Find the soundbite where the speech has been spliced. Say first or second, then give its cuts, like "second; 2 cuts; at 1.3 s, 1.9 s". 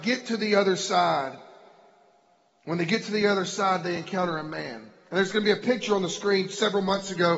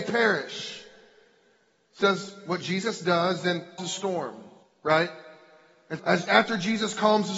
second; 4 cuts; at 2.0 s, 3.8 s, 4.6 s, 6.0 s